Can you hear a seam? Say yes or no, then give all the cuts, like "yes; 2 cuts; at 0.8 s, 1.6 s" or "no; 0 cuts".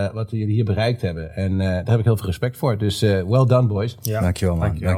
no; 0 cuts